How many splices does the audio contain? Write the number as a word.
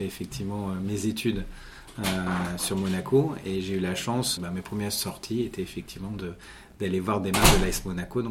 one